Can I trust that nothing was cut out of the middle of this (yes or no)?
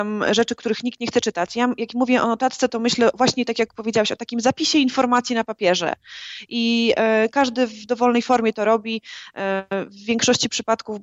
yes